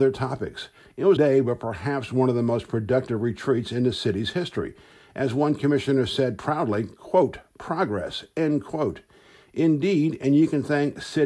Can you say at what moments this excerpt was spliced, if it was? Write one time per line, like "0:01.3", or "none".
0:01.2